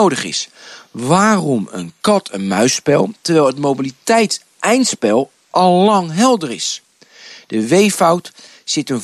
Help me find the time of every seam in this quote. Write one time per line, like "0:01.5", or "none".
none